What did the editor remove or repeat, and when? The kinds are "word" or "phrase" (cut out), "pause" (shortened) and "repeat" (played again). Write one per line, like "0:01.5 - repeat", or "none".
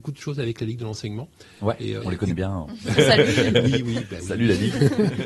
0:02.0 - word
0:03.0 - word

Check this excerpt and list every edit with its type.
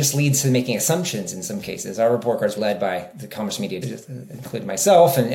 0:02.6 - word
0:03.8 - word

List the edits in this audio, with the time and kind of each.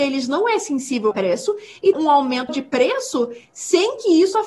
0:01.1 - word
0:01.9 - word
0:02.5 - word

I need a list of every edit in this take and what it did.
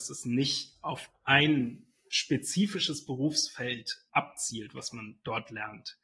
0:02.0 - pause
0:04.1 - word

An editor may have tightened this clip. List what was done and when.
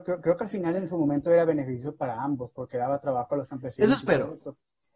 none

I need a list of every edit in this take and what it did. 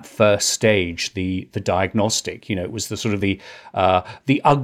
none

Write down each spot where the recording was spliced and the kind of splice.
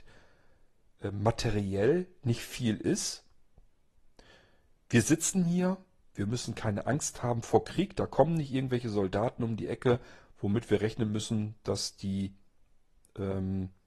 none

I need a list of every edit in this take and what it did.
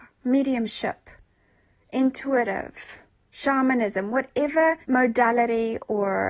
0:03.1 - pause
0:04.8 - pause

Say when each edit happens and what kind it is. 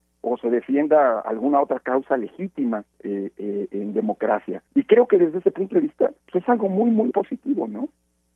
0:02.9 - pause
0:04.7 - pause
0:06.2 - pause
0:07.1 - word

